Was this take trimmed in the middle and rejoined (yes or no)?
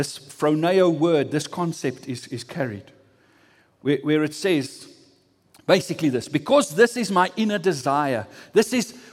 no